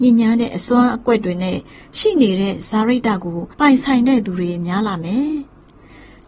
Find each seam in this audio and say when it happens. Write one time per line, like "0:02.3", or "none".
0:03.5